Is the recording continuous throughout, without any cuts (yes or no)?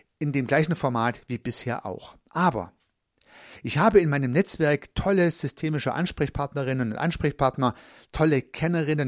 yes